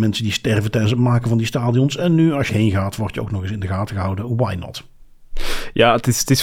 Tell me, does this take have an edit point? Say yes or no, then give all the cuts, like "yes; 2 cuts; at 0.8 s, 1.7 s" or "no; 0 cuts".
yes; 1 cut; at 2.5 s